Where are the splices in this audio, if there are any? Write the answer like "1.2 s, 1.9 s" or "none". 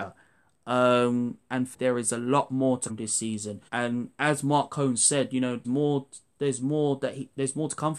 1.7 s, 2.9 s, 3.7 s, 5.6 s